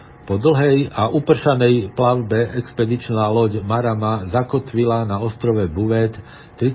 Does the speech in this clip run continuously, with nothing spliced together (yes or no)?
yes